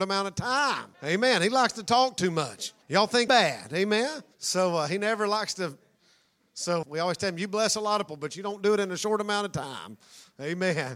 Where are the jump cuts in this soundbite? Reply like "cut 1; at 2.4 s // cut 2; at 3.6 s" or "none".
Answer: cut 1; at 0.9 s // cut 2; at 2.8 s // cut 3; at 3.3 s // cut 4; at 4.3 s // cut 5; at 6.8 s // cut 6; at 8.1 s